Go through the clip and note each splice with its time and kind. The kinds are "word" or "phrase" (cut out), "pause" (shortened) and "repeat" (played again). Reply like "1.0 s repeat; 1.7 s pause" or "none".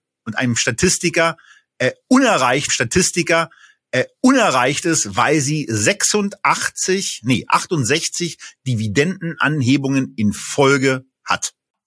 2.7 s repeat